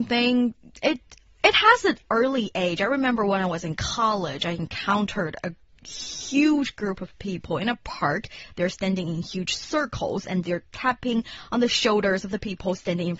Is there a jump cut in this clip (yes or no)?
no